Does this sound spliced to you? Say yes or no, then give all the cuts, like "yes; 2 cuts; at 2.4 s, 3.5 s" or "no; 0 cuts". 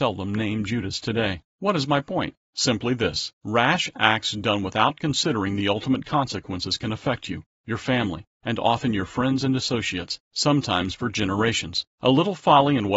yes; 5 cuts; at 1.5 s, 2.4 s, 3.3 s, 10.2 s, 11.9 s